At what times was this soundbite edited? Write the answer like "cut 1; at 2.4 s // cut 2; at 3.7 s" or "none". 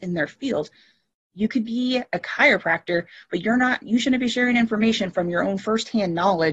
none